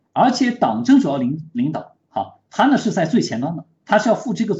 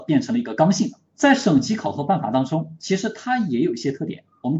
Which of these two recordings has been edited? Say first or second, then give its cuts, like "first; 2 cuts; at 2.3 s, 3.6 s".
second; 1 cut; at 1.1 s